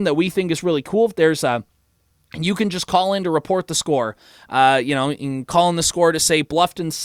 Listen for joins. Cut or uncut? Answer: uncut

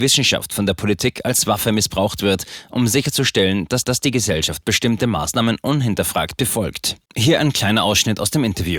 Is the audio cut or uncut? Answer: cut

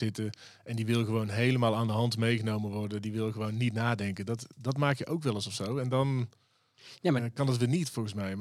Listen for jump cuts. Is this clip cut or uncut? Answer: uncut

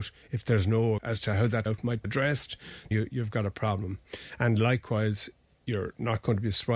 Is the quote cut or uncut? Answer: cut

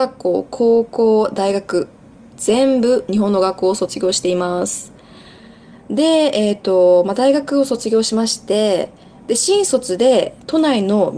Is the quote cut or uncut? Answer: uncut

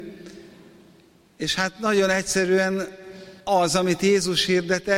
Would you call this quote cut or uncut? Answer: cut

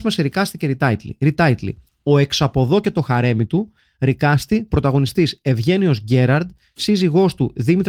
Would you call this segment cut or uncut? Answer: uncut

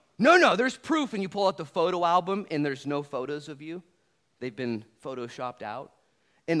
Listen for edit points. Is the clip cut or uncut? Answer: uncut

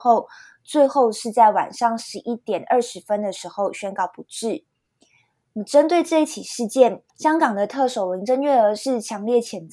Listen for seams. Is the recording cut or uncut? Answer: cut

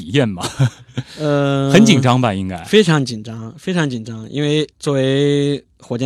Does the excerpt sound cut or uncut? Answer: cut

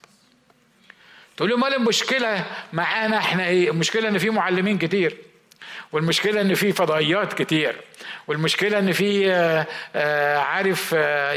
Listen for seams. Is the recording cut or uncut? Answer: uncut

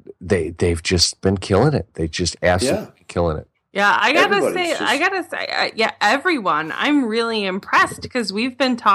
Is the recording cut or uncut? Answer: uncut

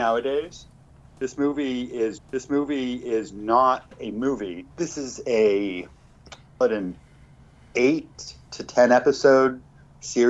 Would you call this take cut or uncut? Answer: cut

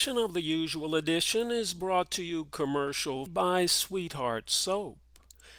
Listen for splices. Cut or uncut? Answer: cut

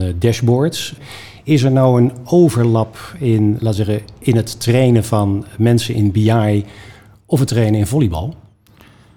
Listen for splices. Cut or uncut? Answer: uncut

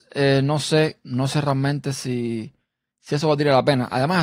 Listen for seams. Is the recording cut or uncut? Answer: uncut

